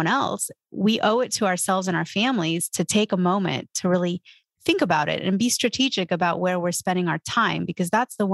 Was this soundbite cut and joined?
no; 0 cuts

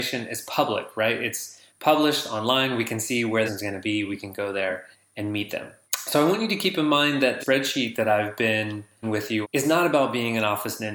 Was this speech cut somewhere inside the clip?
yes; 7 cuts; at 1.7 s, 3.5 s, 4.9 s, 5.9 s, 7.4 s, 9.0 s, 9.4 s

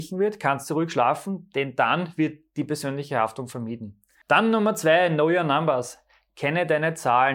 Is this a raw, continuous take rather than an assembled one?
yes; 0 cuts

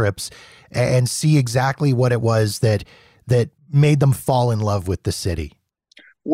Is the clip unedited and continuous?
no; 1 cut; at 3.6 s

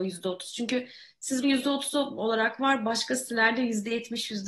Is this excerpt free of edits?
no; 1 cut; at 1.4 s

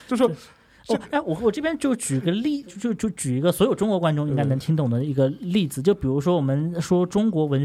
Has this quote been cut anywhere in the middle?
yes; 1 cut; at 2.7 s

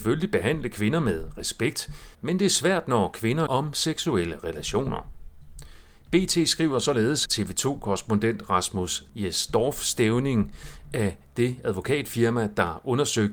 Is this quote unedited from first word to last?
no; 4 cuts; at 2.1 s, 3.5 s, 7.3 s, 9.1 s

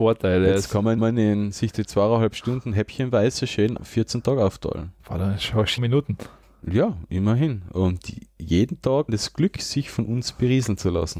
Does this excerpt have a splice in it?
yes; 5 cuts; at 1.0 s, 3.8 s, 5.0 s, 5.8 s, 9.1 s

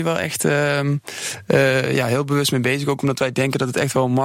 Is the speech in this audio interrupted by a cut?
no; 0 cuts

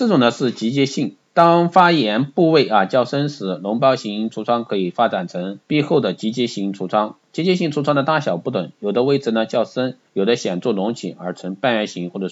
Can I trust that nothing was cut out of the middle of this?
no; 3 cuts; at 1.2 s, 5.6 s, 10.1 s

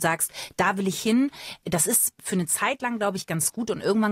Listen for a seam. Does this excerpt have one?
no; 0 cuts

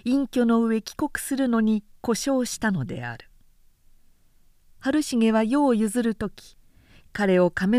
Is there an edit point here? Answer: no; 0 cuts

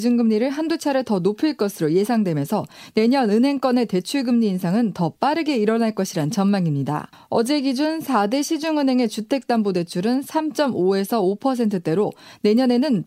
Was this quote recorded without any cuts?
yes; 0 cuts

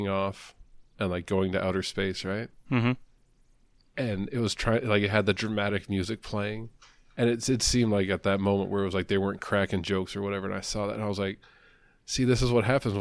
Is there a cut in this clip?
no; 0 cuts

